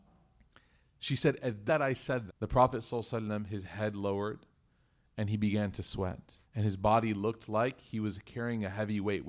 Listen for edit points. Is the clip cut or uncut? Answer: cut